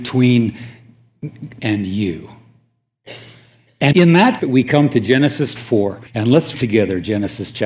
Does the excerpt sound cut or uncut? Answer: cut